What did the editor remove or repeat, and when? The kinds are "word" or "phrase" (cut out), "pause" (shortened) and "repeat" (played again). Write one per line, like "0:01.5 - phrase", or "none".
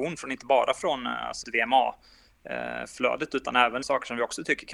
0:01.4 - word
0:03.8 - phrase